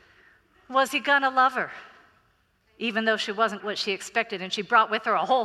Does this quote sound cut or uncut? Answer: cut